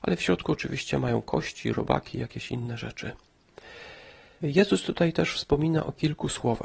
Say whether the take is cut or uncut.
uncut